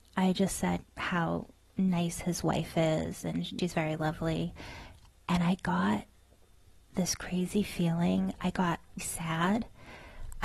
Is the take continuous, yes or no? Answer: no